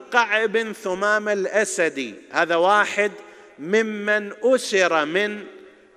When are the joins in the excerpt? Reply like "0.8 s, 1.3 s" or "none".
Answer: none